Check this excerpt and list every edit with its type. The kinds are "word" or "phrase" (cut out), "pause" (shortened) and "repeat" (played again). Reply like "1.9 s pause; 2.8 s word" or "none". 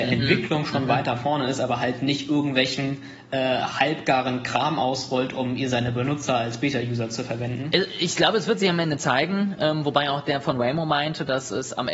none